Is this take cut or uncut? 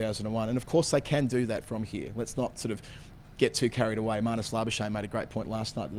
uncut